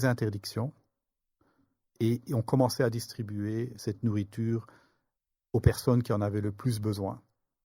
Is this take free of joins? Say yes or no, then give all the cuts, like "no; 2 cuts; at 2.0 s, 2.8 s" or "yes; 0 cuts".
yes; 0 cuts